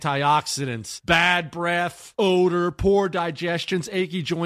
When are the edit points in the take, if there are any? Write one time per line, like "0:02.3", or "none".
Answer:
none